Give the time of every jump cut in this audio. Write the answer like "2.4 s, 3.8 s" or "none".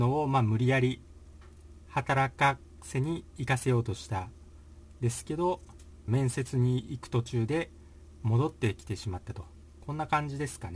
6.1 s